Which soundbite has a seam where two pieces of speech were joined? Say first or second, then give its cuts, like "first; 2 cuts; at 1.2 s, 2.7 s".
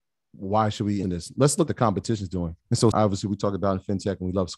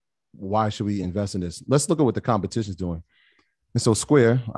first; 4 cuts; at 1.0 s, 1.7 s, 2.6 s, 2.9 s